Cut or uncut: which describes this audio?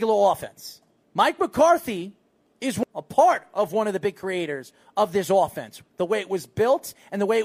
uncut